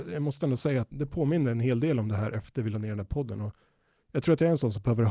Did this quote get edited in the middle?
yes; 1 cut; at 0.9 s

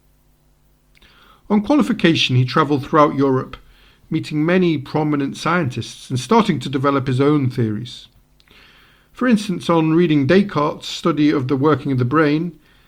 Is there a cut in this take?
no; 0 cuts

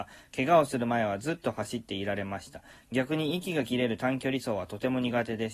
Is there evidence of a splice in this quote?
no; 0 cuts

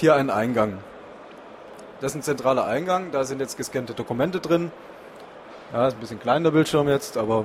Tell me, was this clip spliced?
no; 0 cuts

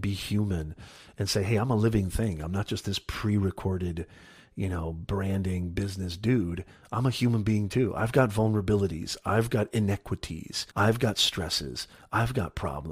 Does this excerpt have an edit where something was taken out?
yes; 1 cut; at 10.7 s

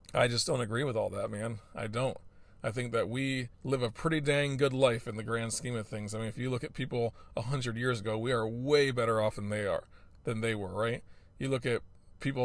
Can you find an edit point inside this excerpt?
yes; 1 cut; at 3.5 s

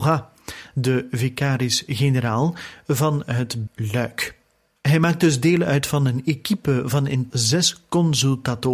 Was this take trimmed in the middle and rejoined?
yes; 2 cuts; at 3.7 s, 7.3 s

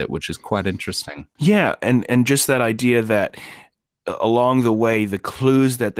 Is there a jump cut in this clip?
no; 0 cuts

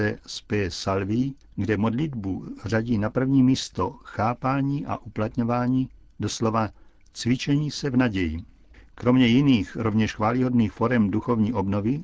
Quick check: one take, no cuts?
yes; 0 cuts

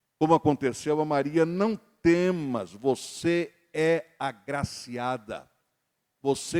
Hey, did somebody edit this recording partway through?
no; 0 cuts

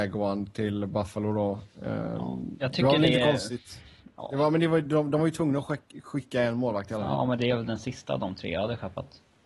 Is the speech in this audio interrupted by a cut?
no; 0 cuts

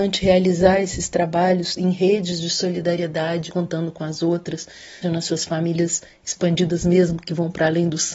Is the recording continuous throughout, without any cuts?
no; 4 cuts; at 1.8 s, 3.5 s, 5.0 s, 6.2 s

